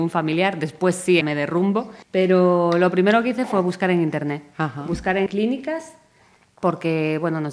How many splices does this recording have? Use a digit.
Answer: 3